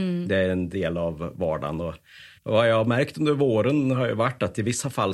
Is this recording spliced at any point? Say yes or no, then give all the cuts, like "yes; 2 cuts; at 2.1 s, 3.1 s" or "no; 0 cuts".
yes; 1 cut; at 2.4 s